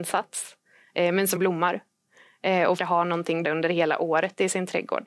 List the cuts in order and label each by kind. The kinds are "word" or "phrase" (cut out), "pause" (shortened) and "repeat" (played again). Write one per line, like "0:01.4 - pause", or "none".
0:01.4 - word
0:02.8 - word
0:03.4 - word